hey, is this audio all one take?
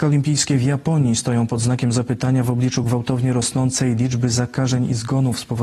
yes; 0 cuts

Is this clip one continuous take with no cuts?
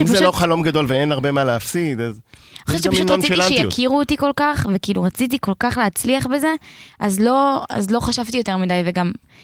yes; 0 cuts

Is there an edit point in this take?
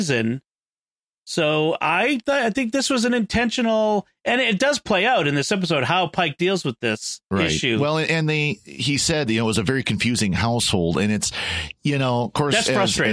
yes; 1 cut; at 7.2 s

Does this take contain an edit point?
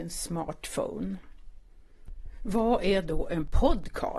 no; 0 cuts

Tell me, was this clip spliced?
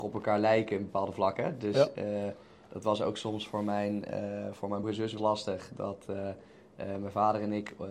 yes; 2 cuts; at 4.8 s, 5.2 s

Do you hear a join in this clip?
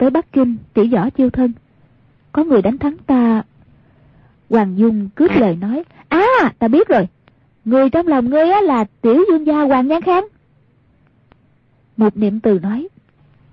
no; 0 cuts

